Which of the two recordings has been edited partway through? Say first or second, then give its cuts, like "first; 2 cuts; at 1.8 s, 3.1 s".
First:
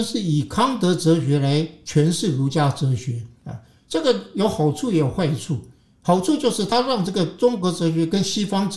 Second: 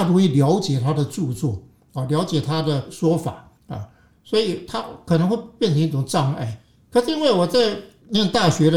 second; 1 cut; at 3.6 s